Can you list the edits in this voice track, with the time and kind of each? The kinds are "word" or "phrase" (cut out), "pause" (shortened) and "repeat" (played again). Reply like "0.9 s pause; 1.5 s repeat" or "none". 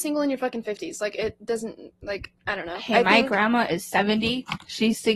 none

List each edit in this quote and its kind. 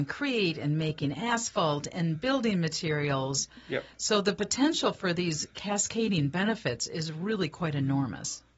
none

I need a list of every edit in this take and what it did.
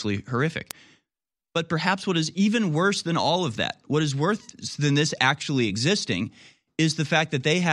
none

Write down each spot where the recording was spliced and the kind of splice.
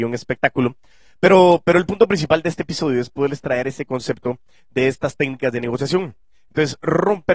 none

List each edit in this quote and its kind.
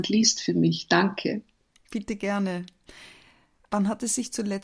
none

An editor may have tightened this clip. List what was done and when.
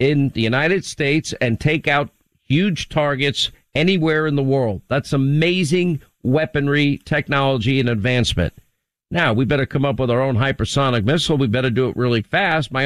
none

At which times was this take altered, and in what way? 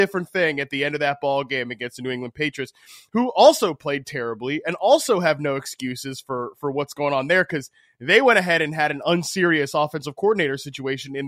none

